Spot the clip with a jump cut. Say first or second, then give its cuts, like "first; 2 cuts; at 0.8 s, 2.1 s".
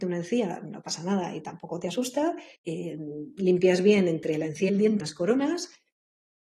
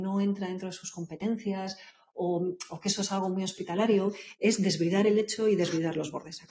first; 3 cuts; at 2.5 s, 4.7 s, 5.0 s